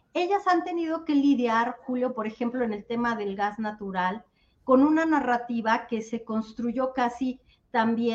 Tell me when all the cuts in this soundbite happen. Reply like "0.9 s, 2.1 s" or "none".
none